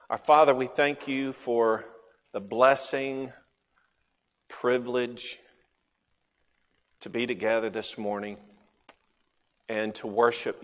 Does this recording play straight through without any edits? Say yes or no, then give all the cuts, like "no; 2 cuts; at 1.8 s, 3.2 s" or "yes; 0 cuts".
yes; 0 cuts